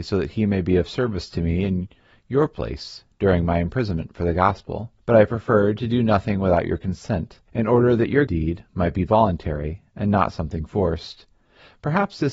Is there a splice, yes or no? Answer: yes